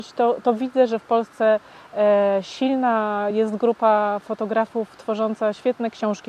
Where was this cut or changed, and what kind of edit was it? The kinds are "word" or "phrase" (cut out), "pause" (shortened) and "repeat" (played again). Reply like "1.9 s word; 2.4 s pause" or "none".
none